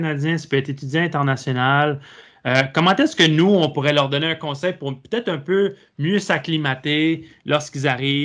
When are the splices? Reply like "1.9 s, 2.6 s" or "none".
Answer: none